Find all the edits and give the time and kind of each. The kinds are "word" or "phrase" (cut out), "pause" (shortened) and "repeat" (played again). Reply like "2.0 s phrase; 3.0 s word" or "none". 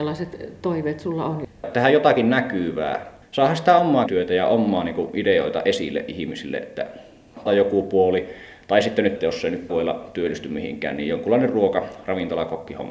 4.1 s word; 7.5 s phrase; 9.7 s word

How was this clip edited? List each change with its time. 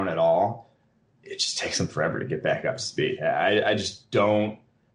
none

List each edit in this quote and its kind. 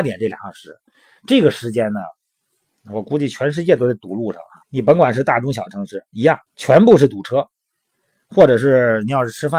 4.6 s pause; 6.5 s pause

